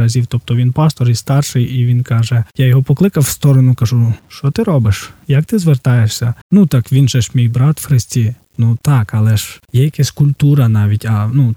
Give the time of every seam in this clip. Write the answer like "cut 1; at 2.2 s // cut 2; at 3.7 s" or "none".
cut 1; at 2.5 s // cut 2; at 4.2 s // cut 3; at 6.4 s // cut 4; at 9.6 s